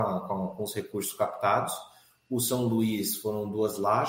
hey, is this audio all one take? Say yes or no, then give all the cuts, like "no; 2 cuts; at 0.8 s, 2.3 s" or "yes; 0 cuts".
yes; 0 cuts